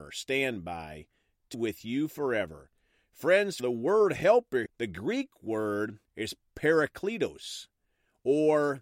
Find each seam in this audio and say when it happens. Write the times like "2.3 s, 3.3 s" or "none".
1.5 s, 3.6 s, 4.7 s, 6.1 s